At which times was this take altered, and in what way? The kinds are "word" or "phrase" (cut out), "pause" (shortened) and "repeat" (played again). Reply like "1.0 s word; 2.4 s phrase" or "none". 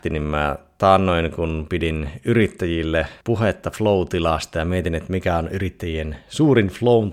3.2 s pause

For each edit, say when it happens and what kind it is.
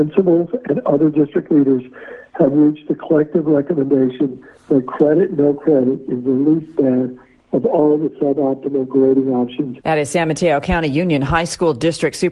none

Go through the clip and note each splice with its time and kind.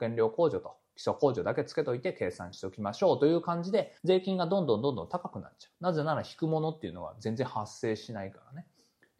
4.0 s pause

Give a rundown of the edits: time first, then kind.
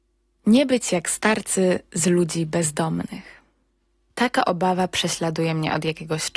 none

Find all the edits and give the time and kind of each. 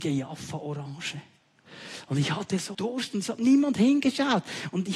2.7 s word

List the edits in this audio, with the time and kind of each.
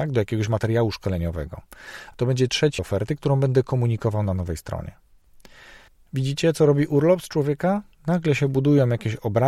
2.8 s word; 5.9 s pause

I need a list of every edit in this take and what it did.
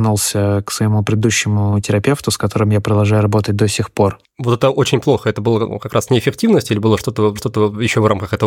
7.4 s repeat

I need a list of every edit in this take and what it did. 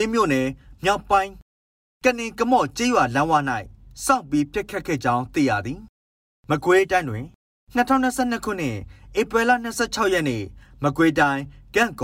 none

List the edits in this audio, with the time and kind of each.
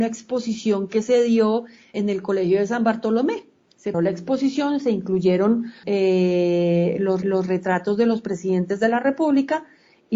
1.9 s word; 3.9 s word; 5.8 s word; 7.2 s repeat

